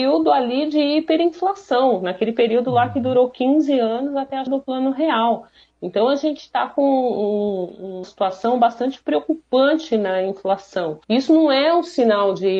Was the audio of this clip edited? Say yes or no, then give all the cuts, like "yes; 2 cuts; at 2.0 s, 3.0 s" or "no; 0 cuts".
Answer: yes; 3 cuts; at 4.5 s, 8.0 s, 11.0 s